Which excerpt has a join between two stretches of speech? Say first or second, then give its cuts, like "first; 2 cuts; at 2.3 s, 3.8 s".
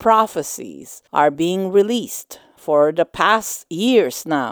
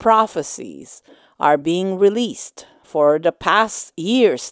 first; 1 cut; at 1.1 s